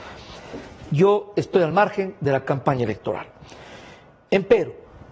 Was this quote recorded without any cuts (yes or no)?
yes